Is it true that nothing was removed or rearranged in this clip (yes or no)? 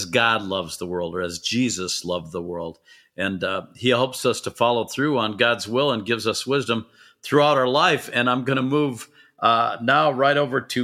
yes